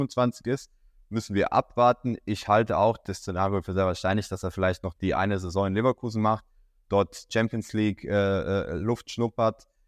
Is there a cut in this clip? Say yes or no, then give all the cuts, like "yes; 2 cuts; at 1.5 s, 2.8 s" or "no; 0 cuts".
no; 0 cuts